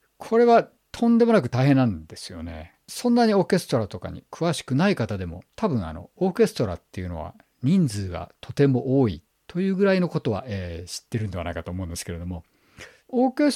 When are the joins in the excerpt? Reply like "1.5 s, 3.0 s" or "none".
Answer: 5.5 s